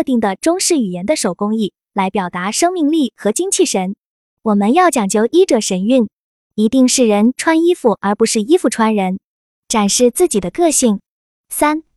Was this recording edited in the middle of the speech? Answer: no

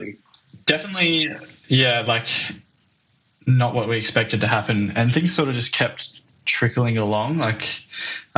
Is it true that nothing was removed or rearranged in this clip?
yes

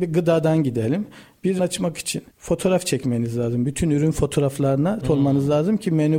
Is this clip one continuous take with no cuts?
no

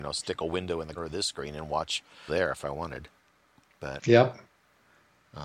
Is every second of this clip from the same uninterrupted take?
no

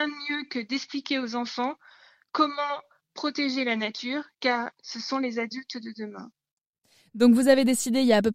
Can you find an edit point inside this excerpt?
no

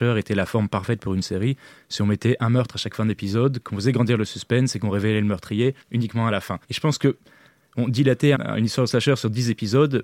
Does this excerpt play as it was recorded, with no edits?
no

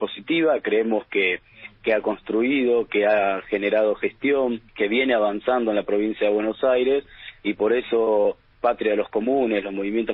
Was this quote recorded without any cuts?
no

